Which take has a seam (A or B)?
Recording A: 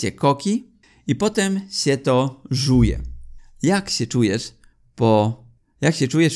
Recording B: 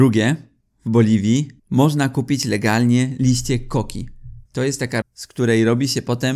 B